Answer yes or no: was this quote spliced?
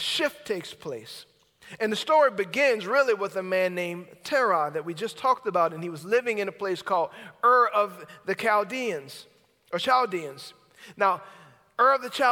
no